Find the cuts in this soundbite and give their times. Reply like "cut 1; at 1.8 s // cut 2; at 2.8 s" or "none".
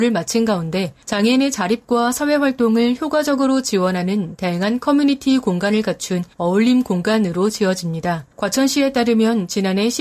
cut 1; at 1.0 s // cut 2; at 6.3 s // cut 3; at 8.3 s